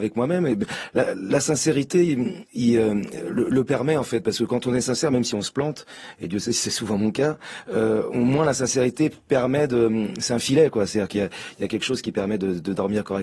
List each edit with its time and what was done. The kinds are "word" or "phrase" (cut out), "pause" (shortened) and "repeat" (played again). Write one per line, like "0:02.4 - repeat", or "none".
0:02.5 - pause